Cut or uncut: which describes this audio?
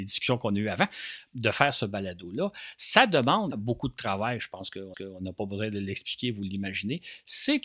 cut